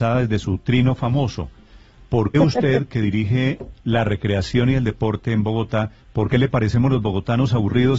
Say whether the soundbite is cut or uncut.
cut